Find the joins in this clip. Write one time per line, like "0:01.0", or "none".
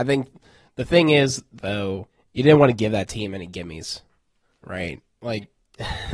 none